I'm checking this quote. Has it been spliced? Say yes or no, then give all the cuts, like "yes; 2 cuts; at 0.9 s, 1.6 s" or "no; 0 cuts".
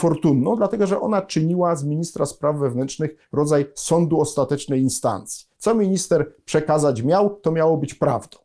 no; 0 cuts